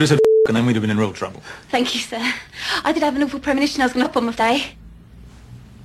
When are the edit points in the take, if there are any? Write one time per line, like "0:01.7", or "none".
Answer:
0:04.0
0:04.3